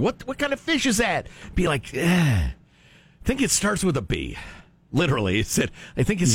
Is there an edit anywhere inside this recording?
no; 0 cuts

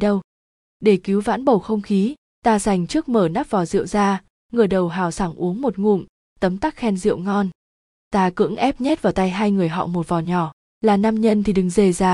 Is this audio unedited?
yes; 0 cuts

